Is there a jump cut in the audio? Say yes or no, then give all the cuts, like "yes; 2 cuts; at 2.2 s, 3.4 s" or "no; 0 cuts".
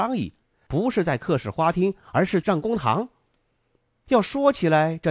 no; 0 cuts